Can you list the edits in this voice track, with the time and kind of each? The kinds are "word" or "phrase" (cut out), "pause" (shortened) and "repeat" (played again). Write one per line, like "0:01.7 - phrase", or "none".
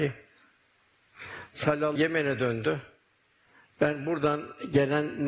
0:02.0 - phrase